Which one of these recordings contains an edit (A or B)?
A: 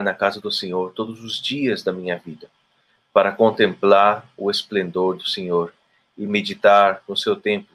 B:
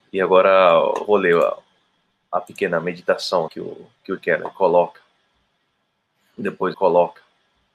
B